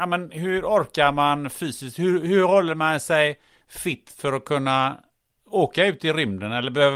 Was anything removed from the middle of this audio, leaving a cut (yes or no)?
no